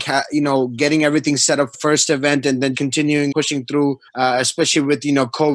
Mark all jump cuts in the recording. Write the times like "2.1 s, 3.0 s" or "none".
1.7 s, 2.7 s, 3.3 s, 4.1 s